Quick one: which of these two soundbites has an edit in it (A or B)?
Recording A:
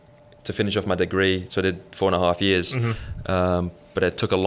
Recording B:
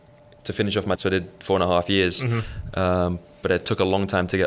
B